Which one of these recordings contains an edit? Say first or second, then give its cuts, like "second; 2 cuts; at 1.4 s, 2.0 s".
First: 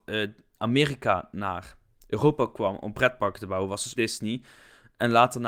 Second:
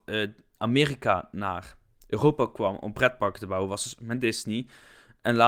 first; 1 cut; at 4.0 s